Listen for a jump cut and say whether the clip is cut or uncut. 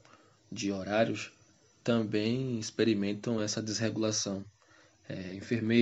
uncut